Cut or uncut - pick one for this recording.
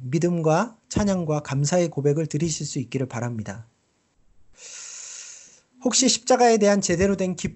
uncut